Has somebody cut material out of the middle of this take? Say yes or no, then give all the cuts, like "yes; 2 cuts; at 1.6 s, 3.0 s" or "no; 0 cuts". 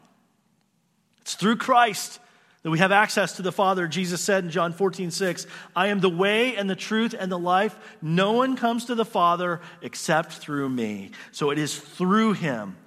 no; 0 cuts